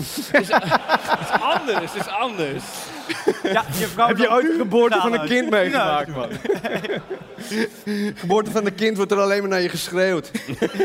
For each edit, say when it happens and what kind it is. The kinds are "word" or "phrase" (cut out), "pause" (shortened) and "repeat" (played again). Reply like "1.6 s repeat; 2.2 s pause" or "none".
none